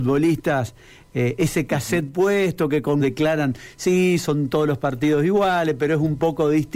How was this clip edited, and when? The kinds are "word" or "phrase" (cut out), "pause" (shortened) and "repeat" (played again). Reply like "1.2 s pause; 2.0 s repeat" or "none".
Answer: 3.0 s word